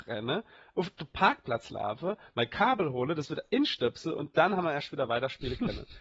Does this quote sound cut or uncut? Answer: uncut